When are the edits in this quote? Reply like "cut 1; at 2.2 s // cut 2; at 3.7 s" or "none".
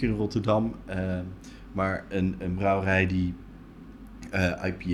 none